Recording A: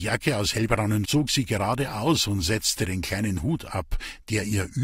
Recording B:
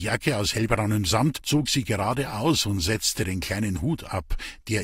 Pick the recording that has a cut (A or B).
A